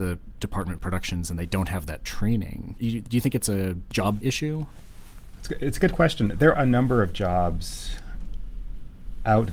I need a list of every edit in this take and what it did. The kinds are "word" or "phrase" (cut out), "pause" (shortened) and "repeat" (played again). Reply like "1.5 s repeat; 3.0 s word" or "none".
4.2 s word; 6.5 s word